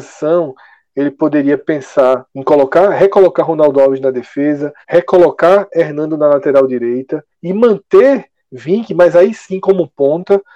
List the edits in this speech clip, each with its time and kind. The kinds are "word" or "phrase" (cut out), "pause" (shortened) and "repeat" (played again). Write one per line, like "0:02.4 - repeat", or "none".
0:02.3 - pause
0:04.8 - pause
0:07.3 - pause